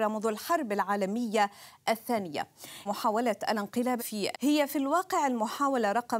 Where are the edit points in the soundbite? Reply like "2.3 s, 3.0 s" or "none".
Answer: 2.9 s, 4.0 s, 4.3 s